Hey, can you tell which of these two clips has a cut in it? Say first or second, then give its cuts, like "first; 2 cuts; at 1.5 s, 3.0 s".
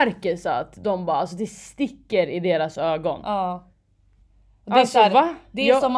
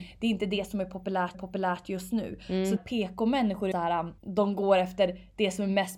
second; 4 cuts; at 1.3 s, 2.8 s, 3.7 s, 4.2 s